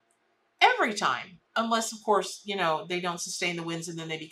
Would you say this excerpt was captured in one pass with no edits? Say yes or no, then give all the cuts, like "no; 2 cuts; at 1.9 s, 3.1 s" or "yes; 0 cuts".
yes; 0 cuts